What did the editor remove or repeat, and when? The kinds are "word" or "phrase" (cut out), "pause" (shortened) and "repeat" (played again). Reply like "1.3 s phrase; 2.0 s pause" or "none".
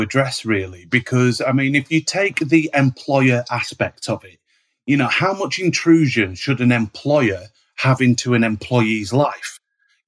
none